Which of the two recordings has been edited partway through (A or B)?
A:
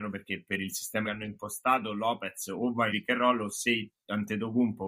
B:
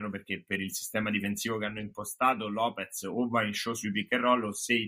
A